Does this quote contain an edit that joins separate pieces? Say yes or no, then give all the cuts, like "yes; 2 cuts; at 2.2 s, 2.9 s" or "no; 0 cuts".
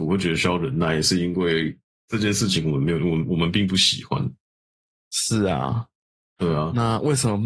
no; 0 cuts